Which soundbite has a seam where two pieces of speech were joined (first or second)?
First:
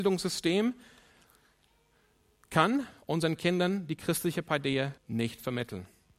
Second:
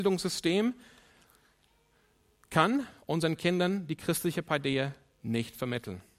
first